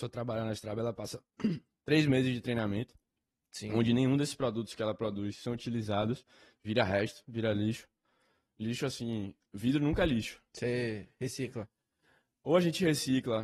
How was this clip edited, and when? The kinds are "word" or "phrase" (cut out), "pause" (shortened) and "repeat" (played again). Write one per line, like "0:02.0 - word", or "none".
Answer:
0:10.5 - pause